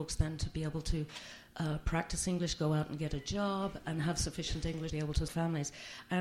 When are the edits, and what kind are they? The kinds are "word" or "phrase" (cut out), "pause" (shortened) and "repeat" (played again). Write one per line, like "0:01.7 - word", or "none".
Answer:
0:04.9 - word
0:05.3 - word